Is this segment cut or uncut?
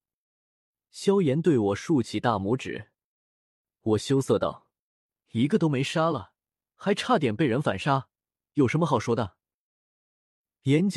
uncut